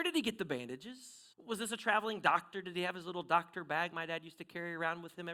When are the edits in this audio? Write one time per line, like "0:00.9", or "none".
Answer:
0:01.3
0:03.9